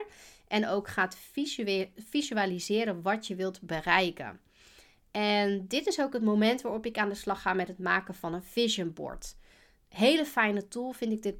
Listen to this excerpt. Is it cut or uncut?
uncut